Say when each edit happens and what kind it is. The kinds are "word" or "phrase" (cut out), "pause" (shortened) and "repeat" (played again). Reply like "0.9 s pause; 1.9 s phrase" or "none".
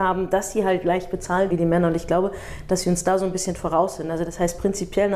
1.5 s word

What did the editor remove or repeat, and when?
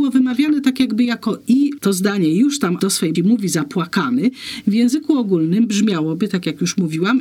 1.8 s phrase; 2.8 s word; 3.1 s word

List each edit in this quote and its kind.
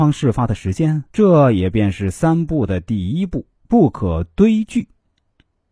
1.1 s pause; 3.6 s pause

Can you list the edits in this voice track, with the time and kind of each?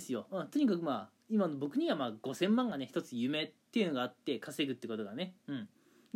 3.6 s pause

